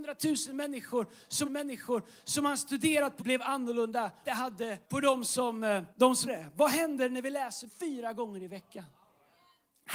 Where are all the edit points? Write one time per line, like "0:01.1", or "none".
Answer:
0:01.4
0:03.2
0:04.2
0:04.8
0:05.9
0:06.3
0:07.7